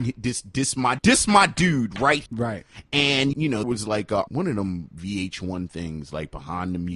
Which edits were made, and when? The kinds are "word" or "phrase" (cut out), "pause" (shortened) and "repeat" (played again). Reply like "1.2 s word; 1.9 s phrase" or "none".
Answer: 1.0 s word; 2.3 s word; 3.3 s word; 3.6 s word; 4.3 s word